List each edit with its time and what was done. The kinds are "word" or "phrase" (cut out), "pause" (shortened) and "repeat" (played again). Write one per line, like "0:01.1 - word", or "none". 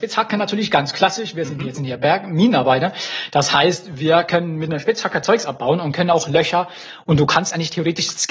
0:01.7 - phrase